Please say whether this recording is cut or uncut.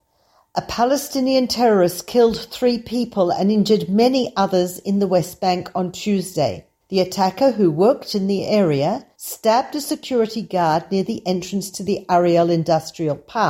cut